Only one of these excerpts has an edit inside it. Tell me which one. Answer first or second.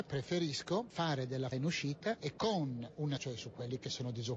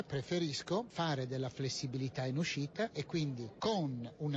first